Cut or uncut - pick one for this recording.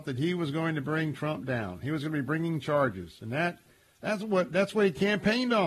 uncut